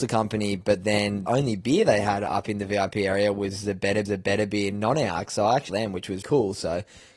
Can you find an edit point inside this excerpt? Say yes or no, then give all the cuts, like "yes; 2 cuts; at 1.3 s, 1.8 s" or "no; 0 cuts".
yes; 4 cuts; at 1.3 s, 4.0 s, 5.7 s, 6.2 s